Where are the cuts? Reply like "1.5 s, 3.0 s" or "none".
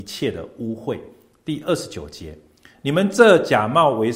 none